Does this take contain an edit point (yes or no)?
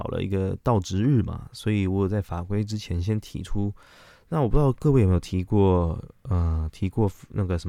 no